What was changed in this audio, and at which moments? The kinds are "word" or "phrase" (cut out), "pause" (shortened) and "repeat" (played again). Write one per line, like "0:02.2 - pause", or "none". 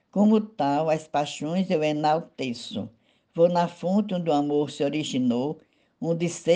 none

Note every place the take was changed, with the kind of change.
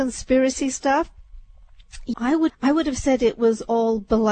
0:02.1 - word
0:02.5 - word

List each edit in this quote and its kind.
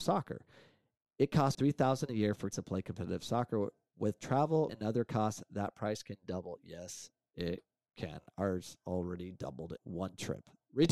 0:01.5 - word
0:02.5 - word
0:04.7 - word
0:09.8 - word

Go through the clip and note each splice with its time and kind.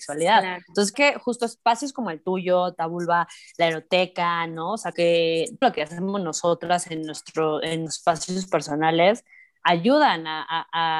0:00.9 - word
0:04.9 - word
0:05.6 - word
0:07.9 - word

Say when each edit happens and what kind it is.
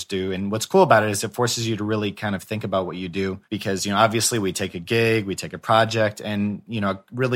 0:03.4 - pause

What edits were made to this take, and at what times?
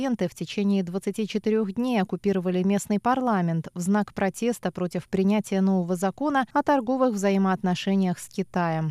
0:06.5 - pause

